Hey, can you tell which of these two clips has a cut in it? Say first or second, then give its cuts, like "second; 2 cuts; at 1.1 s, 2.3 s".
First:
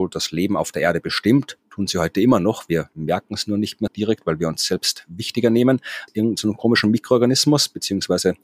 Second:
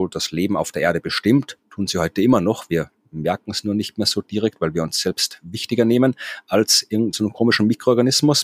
first; 3 cuts; at 2.9 s, 3.9 s, 6.1 s